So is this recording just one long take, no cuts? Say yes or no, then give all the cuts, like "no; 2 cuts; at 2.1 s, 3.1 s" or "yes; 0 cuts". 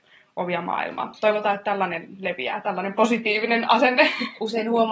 yes; 0 cuts